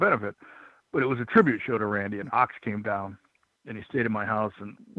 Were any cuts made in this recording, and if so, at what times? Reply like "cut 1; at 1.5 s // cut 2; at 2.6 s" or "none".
none